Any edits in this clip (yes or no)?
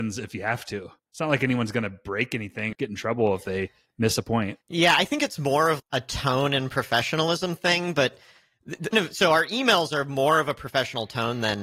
yes